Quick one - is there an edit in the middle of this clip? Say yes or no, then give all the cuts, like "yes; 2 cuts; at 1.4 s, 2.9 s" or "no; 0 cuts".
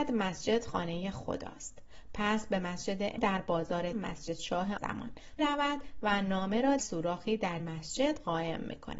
yes; 6 cuts; at 3.2 s, 3.9 s, 4.8 s, 5.4 s, 6.8 s, 7.6 s